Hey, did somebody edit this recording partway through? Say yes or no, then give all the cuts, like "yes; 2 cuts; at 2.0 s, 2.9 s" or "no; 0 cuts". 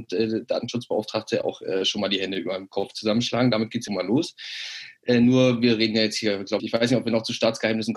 yes; 2 cuts; at 3.9 s, 6.6 s